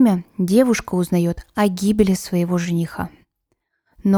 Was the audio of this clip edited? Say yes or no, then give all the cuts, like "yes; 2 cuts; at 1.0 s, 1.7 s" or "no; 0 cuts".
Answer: no; 0 cuts